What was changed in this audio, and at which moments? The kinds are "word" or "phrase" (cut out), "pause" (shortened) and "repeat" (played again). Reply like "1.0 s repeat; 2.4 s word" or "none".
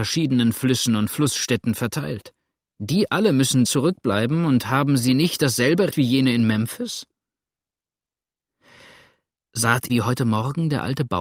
3.6 s word; 5.9 s word; 9.9 s word